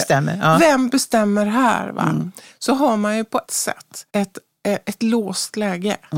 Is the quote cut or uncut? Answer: cut